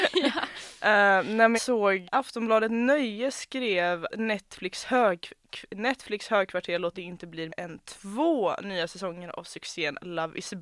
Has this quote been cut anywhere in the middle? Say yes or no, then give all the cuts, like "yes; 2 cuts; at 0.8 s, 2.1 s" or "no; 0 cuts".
yes; 5 cuts; at 1.5 s, 2.0 s, 4.1 s, 6.9 s, 7.5 s